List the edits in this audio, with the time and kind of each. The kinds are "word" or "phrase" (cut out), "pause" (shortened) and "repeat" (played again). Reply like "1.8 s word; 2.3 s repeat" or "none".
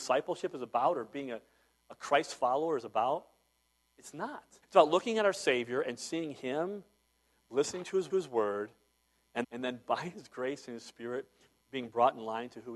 4.6 s pause; 8.1 s repeat; 9.4 s word